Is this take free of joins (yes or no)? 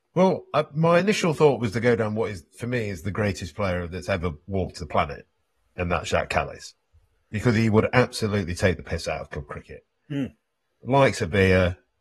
yes